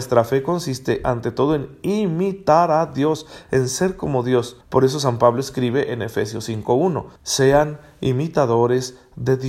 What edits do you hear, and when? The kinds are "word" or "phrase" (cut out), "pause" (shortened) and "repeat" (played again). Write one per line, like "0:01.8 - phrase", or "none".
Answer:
0:04.6 - pause
0:07.2 - pause